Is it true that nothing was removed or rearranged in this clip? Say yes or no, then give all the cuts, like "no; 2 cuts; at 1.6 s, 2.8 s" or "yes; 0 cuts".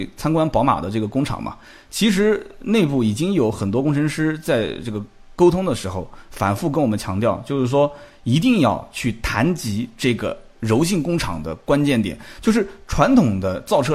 yes; 0 cuts